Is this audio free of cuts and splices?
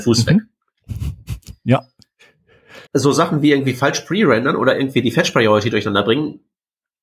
no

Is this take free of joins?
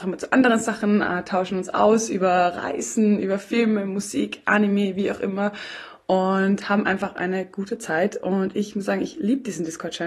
yes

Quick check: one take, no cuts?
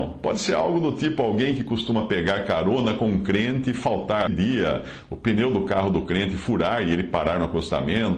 no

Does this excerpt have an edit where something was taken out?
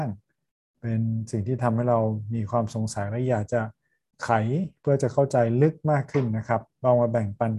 no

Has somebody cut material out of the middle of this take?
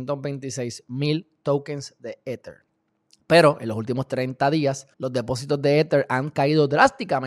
yes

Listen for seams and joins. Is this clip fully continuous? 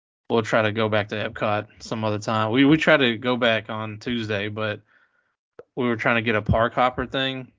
no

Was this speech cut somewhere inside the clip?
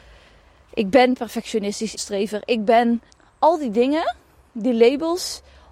yes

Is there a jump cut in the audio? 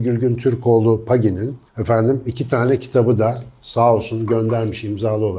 yes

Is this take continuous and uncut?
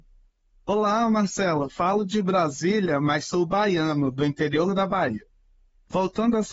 yes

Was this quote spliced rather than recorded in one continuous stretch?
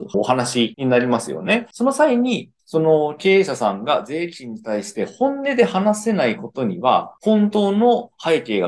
yes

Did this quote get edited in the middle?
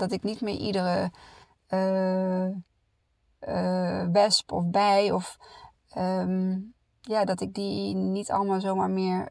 no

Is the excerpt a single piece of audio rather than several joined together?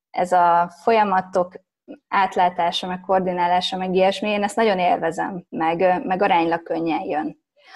no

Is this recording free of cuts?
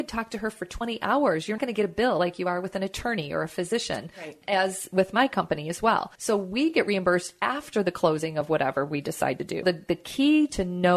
no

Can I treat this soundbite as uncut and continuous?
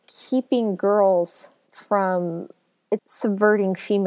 no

